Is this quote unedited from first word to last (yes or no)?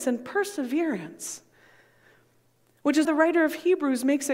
no